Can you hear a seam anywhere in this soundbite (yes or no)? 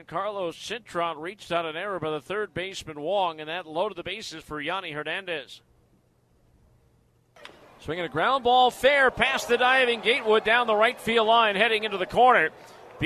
no